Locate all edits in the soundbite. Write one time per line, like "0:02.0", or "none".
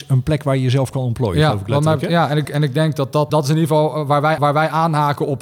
0:02.4
0:03.3
0:04.4

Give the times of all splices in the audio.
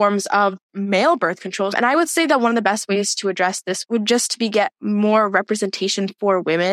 none

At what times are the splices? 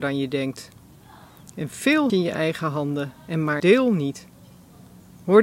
0:02.1
0:03.2
0:03.6

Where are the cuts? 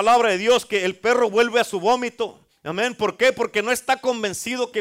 0:02.5

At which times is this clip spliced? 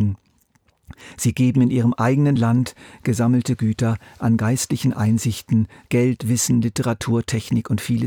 none

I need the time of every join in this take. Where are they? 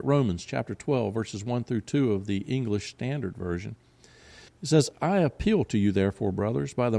0:04.5

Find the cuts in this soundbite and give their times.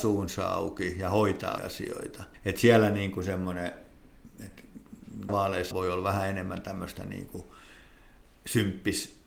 0:01.6
0:02.3
0:05.3
0:05.7

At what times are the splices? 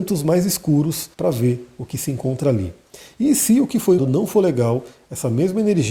0:01.1
0:04.0

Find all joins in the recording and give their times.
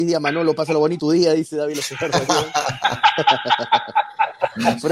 0:01.0

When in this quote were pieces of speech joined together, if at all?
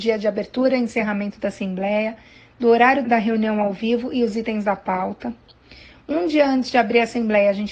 0:03.0

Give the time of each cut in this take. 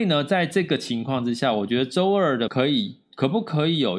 0:02.5

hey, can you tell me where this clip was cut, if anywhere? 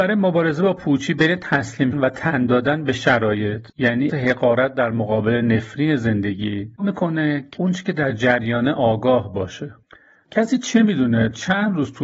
0:01.9
0:04.1
0:06.8
0:07.6

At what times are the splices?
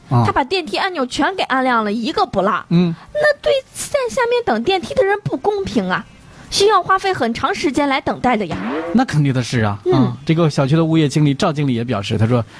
none

